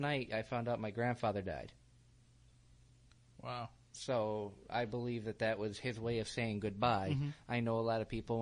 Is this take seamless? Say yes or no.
yes